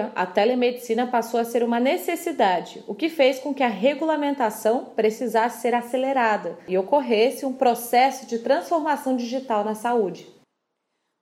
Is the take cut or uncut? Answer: uncut